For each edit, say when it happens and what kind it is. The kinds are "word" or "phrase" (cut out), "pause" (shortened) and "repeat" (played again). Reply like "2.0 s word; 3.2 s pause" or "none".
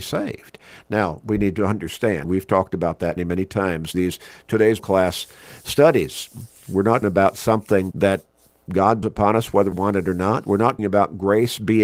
2.2 s word; 3.2 s word; 3.9 s word; 4.8 s word; 7.0 s word; 7.9 s word; 9.0 s word; 9.7 s word; 10.8 s word

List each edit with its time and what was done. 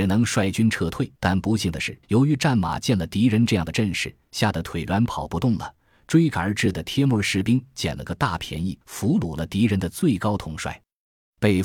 1.2 s pause; 2.0 s pause; 8.8 s pause

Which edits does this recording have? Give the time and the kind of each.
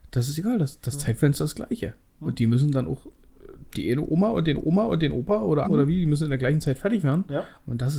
3.7 s pause; 4.6 s repeat; 5.6 s word

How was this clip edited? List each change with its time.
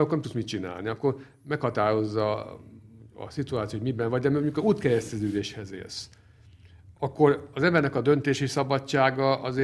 none

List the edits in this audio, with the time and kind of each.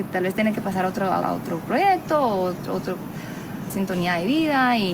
1.2 s word; 3.7 s word

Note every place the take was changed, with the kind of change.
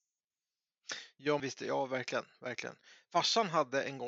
1.4 s word

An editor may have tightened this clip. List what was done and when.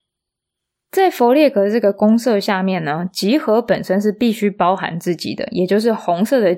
none

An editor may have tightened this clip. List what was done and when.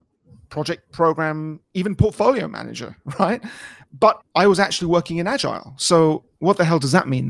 4.2 s word

